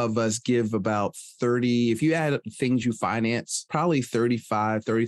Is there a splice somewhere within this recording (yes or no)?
no